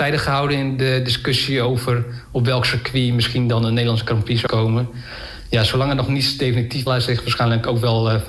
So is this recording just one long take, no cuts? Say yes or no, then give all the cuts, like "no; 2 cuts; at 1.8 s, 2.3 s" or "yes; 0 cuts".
no; 2 cuts; at 4.5 s, 6.9 s